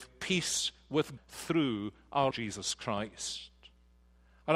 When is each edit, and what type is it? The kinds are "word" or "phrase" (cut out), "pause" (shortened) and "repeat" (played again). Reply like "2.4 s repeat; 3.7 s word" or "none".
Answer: 1.2 s word; 2.3 s word